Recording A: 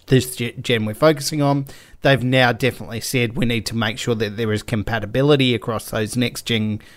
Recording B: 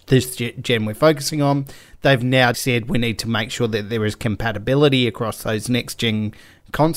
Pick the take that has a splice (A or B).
B